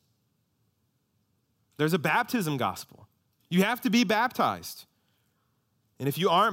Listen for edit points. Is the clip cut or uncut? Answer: uncut